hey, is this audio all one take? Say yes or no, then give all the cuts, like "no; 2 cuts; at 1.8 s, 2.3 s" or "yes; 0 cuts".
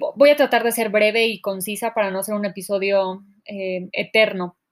yes; 0 cuts